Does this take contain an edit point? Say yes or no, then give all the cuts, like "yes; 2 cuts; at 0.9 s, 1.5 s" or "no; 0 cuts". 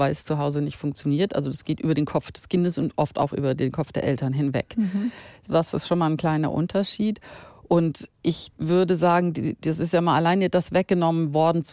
no; 0 cuts